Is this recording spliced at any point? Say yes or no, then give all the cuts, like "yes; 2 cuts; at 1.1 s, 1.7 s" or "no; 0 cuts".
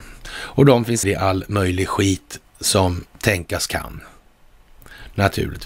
yes; 2 cuts; at 1.0 s, 3.1 s